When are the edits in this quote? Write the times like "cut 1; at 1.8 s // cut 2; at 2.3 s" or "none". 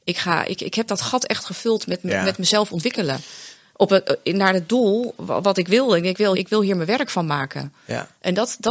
cut 1; at 6.3 s